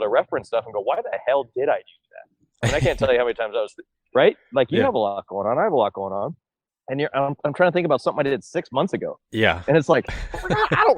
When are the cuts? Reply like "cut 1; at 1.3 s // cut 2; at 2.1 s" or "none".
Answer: none